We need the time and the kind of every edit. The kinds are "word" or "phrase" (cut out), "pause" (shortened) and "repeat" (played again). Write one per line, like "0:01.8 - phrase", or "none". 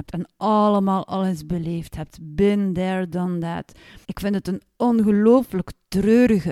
0:04.0 - pause